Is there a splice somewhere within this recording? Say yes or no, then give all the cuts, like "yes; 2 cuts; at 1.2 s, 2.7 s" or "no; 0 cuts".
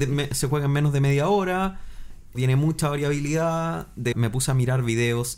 yes; 2 cuts; at 2.3 s, 4.1 s